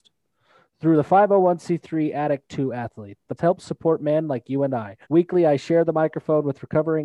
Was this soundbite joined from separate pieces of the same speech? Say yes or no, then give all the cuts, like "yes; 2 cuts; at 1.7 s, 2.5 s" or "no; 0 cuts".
yes; 2 cuts; at 3.4 s, 5.0 s